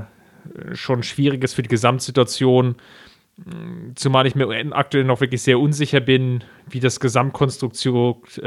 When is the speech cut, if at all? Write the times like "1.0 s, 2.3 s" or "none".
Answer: none